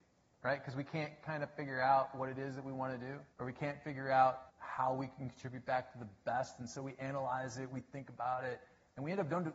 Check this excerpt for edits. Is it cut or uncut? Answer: cut